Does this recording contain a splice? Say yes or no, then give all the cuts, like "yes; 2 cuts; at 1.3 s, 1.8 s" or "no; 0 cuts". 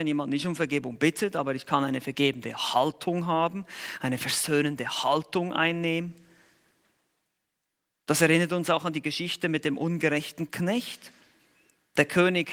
no; 0 cuts